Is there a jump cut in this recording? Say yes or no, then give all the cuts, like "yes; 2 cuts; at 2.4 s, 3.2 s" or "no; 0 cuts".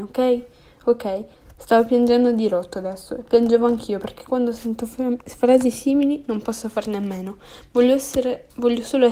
no; 0 cuts